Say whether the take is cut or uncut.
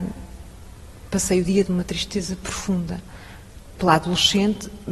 cut